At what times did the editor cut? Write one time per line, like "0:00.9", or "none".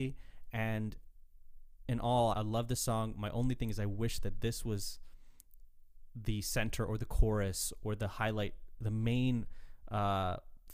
0:02.3